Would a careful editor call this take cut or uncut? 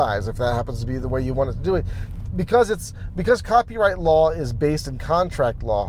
uncut